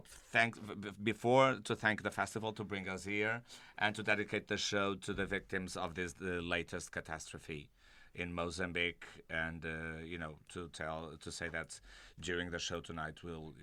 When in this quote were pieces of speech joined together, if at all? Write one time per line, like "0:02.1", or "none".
none